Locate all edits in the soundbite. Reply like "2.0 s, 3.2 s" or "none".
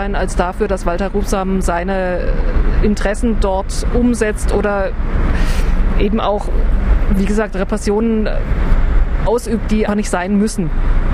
9.9 s